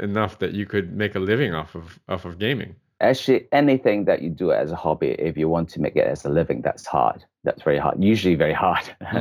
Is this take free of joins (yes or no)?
yes